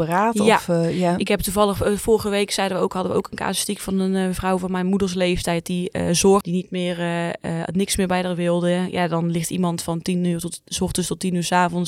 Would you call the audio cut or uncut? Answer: cut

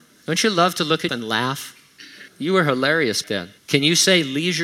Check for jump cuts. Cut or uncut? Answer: cut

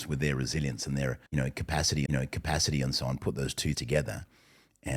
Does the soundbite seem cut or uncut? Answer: cut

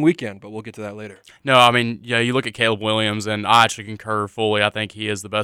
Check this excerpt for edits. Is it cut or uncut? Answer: uncut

